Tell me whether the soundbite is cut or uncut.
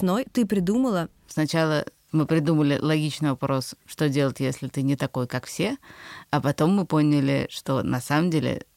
uncut